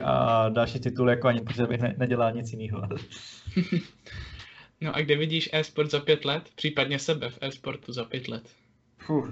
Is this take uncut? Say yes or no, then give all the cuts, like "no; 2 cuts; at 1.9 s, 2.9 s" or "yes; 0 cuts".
no; 1 cut; at 1.4 s